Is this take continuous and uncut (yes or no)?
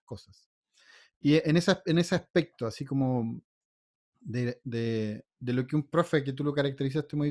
yes